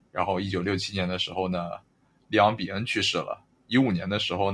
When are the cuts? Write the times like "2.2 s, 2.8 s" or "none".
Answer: none